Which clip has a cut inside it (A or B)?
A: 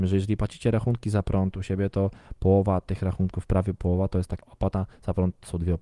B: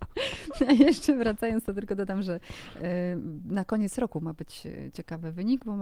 A